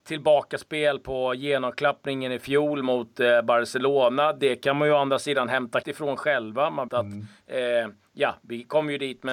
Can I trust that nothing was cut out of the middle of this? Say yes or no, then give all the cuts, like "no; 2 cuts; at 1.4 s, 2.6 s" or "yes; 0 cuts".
no; 2 cuts; at 5.8 s, 6.9 s